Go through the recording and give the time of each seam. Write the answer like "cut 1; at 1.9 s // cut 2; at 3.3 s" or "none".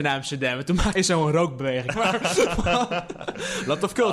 cut 1; at 1.0 s // cut 2; at 1.9 s